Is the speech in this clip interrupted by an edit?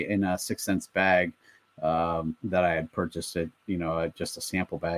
yes; 1 cut; at 2.4 s

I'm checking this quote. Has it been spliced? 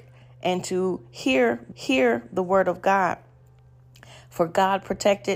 yes; 1 cut; at 1.7 s

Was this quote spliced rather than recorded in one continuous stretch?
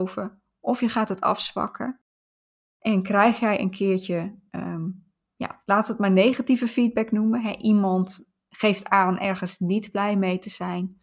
no; 0 cuts

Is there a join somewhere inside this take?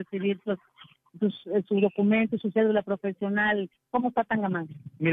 no; 0 cuts

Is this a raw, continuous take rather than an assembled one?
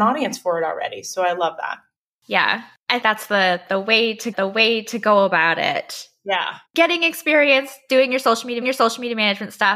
no; 3 cuts; at 3.0 s, 4.3 s, 8.6 s

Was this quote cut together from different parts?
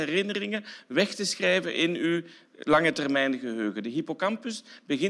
no; 0 cuts

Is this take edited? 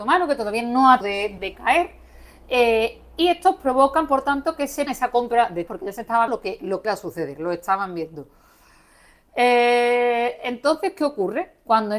yes; 6 cuts; at 1.0 s, 1.4 s, 4.9 s, 5.7 s, 6.3 s, 6.8 s

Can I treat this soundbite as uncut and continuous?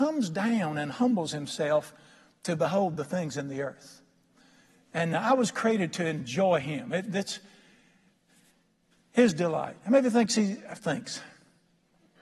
yes; 0 cuts

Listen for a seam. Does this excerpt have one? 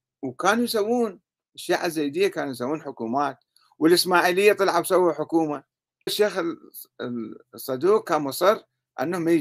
yes; 1 cut; at 6.1 s

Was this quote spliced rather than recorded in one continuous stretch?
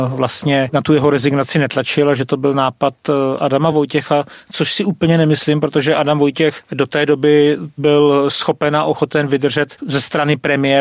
no; 0 cuts

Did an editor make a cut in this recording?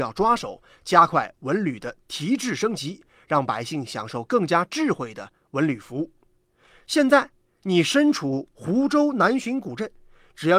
no; 0 cuts

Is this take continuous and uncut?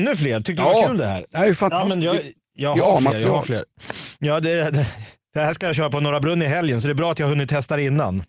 yes; 0 cuts

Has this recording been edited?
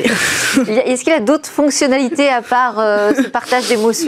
no; 0 cuts

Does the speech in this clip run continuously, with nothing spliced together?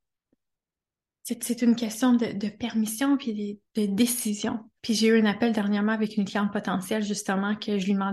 no; 2 cuts; at 3.7 s, 4.8 s

